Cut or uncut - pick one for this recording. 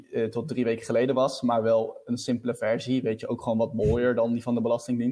uncut